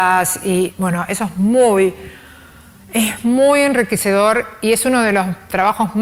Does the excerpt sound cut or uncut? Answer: uncut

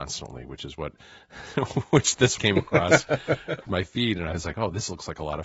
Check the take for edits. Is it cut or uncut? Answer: cut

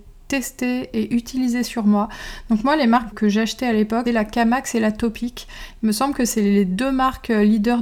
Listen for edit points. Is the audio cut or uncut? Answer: cut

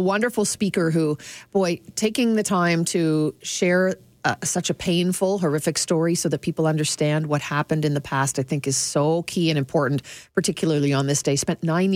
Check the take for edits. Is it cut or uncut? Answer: uncut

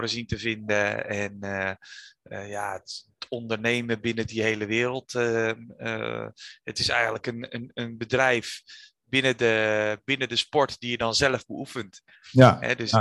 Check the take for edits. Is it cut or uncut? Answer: uncut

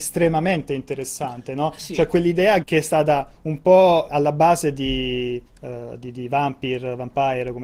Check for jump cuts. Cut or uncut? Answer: cut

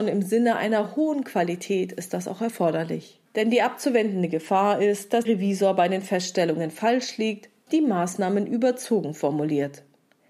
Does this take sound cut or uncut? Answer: cut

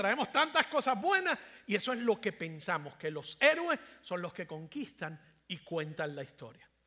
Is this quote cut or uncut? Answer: uncut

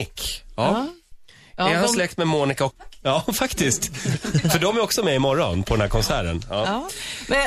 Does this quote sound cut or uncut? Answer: cut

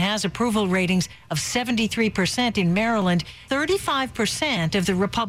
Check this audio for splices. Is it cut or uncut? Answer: cut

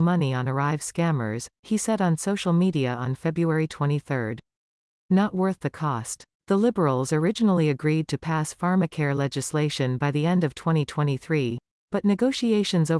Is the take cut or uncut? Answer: uncut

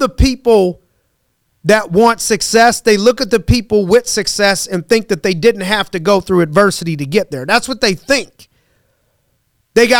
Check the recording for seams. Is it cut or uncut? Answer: uncut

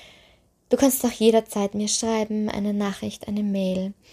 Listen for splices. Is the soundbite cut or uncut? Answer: uncut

